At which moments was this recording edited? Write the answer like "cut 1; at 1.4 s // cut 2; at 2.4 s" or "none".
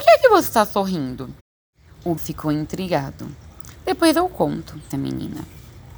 cut 1; at 2.2 s // cut 2; at 4.9 s